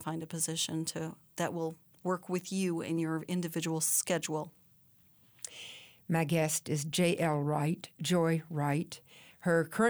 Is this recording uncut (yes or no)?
yes